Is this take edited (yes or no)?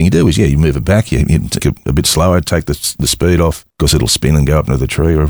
yes